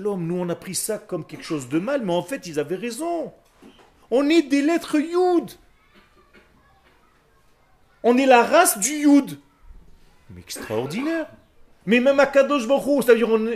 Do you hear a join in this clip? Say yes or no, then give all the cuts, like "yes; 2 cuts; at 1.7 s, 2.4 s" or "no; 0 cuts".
no; 0 cuts